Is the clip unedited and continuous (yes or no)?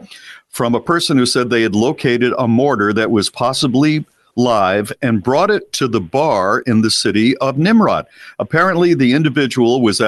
yes